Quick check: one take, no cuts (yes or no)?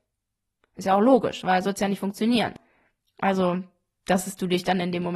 no